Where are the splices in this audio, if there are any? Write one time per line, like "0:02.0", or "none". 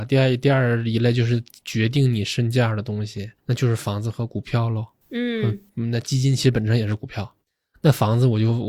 0:03.4